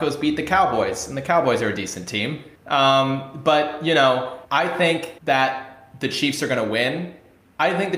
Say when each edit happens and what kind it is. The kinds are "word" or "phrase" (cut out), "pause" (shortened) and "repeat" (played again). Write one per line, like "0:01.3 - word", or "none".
0:02.6 - pause
0:04.4 - pause
0:05.2 - pause